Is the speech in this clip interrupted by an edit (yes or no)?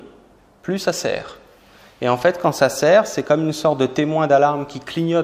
no